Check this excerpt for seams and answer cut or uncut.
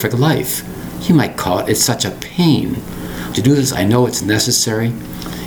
cut